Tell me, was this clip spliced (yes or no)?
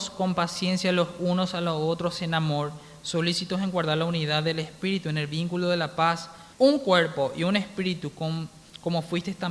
yes